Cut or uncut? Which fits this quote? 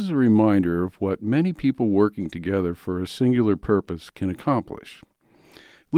uncut